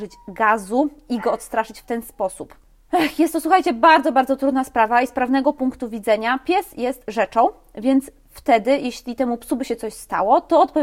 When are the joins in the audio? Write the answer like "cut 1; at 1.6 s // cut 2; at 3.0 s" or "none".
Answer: none